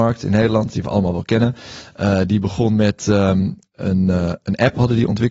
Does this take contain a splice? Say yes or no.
no